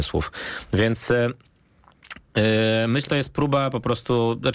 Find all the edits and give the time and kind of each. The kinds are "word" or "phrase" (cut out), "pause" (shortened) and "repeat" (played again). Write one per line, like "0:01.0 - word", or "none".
0:03.1 - word